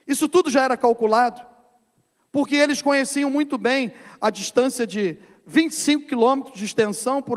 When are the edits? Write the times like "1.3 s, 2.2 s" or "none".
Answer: none